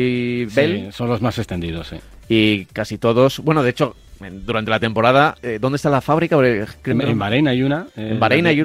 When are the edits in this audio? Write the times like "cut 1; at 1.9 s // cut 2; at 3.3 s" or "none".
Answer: cut 1; at 6.9 s